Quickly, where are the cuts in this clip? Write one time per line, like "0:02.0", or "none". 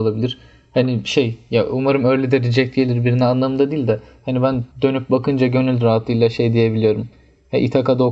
0:04.7